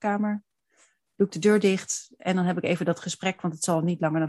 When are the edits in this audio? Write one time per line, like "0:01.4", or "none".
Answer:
none